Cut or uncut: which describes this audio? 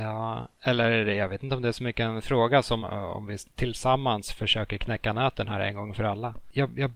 cut